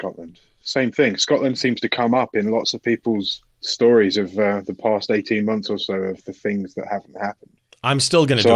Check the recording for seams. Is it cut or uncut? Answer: cut